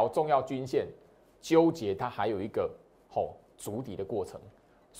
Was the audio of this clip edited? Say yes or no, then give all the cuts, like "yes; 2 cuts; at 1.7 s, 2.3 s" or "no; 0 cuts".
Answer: no; 0 cuts